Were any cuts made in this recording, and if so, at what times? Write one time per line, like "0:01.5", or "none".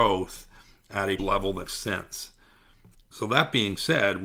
0:01.2
0:01.7
0:02.9